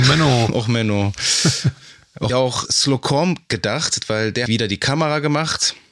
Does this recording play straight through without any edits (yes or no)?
no